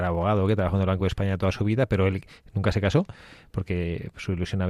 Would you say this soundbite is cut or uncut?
uncut